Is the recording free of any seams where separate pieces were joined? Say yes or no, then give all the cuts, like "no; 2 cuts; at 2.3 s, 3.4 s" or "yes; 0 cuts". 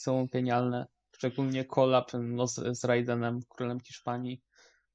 yes; 0 cuts